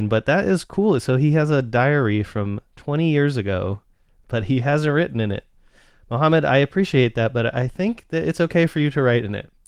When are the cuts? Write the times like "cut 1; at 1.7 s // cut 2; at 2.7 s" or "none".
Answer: none